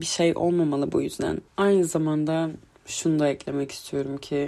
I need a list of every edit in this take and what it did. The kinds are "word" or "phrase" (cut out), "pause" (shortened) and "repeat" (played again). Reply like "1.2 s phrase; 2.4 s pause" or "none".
1.5 s pause